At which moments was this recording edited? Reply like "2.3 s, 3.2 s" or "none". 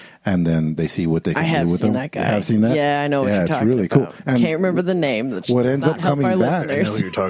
none